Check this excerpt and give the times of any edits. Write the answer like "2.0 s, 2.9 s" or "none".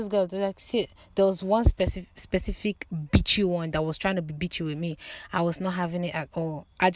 none

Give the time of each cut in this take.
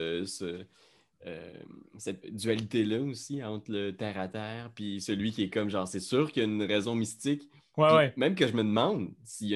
2.2 s

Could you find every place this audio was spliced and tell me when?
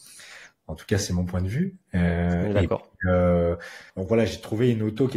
3.9 s

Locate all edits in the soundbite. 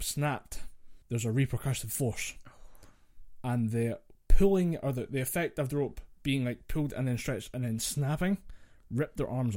1.0 s

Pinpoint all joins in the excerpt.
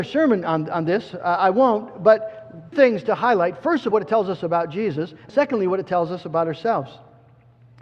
2.7 s, 3.9 s, 5.3 s

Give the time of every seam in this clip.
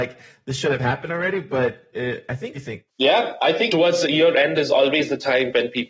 2.5 s, 2.9 s, 3.7 s

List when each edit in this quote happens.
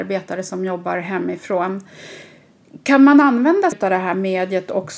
3.7 s

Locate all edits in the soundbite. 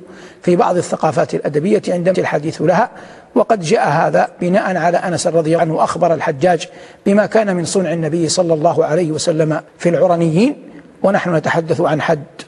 2.1 s, 5.0 s, 5.6 s, 9.7 s

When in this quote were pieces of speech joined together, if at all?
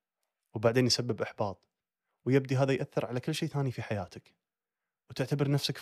none

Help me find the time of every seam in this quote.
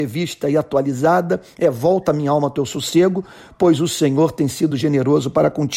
none

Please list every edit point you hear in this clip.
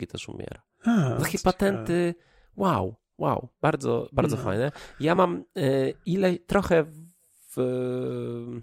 none

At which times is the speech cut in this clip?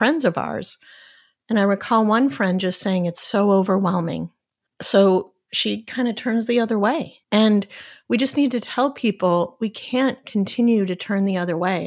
4.7 s, 7.2 s

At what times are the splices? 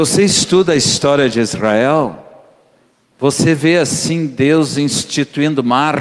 none

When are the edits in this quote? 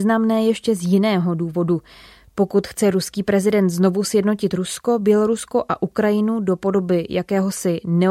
none

